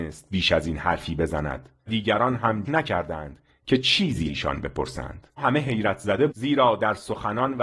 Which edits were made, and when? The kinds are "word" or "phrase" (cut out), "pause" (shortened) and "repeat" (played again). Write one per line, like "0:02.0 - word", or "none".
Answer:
0:01.9 - word
0:02.6 - word
0:04.2 - word
0:05.4 - word
0:06.3 - word